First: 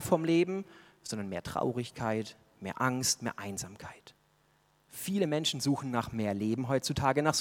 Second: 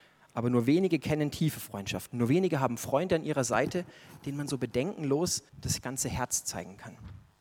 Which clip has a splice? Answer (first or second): second